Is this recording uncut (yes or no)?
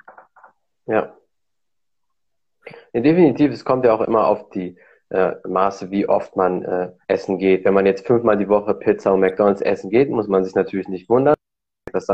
no